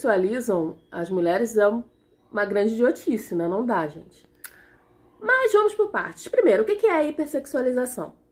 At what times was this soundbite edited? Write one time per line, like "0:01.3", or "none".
none